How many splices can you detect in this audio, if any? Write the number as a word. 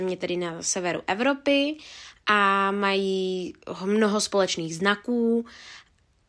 zero